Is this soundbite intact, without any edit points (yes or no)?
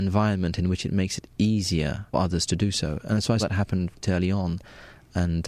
no